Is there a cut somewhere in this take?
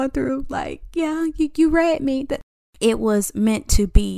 no; 0 cuts

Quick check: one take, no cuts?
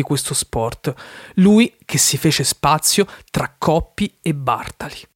yes; 0 cuts

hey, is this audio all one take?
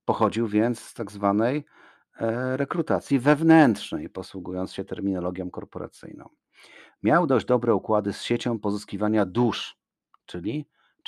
yes; 0 cuts

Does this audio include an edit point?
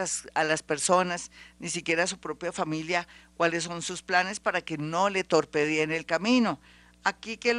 no; 0 cuts

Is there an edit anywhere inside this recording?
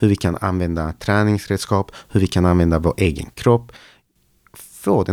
no; 0 cuts

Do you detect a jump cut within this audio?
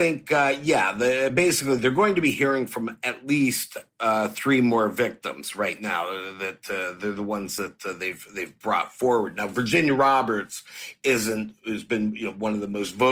no; 0 cuts

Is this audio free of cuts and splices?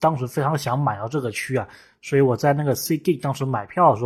yes; 0 cuts

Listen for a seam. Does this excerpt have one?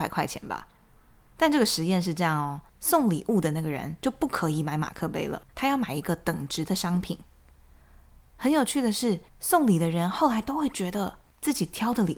yes; 3 cuts; at 2.7 s, 5.5 s, 9.3 s

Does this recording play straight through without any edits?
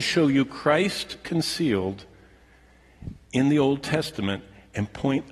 yes; 0 cuts

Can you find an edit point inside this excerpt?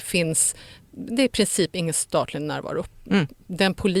no; 0 cuts

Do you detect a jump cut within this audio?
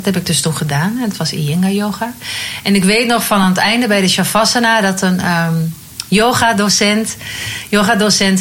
no; 0 cuts

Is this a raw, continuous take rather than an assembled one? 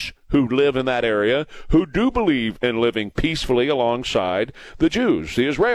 yes; 0 cuts

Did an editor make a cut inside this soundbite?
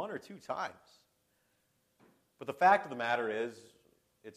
no; 0 cuts

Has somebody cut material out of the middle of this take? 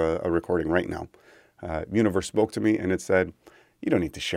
no; 0 cuts

